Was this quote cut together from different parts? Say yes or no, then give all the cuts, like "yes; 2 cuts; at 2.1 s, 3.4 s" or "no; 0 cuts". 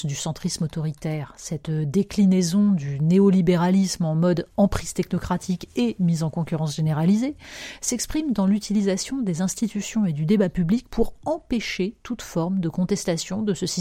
yes; 1 cut; at 4.5 s